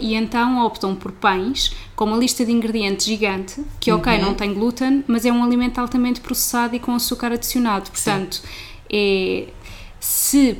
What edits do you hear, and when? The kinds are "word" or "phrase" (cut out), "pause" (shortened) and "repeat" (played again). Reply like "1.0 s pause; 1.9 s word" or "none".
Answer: none